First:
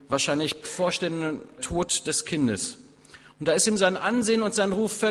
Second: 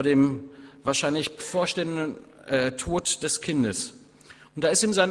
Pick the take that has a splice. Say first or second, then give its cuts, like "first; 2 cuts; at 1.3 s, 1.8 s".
first; 1 cut; at 1.6 s